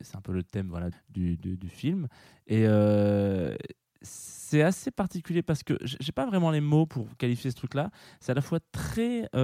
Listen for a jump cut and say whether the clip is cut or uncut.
cut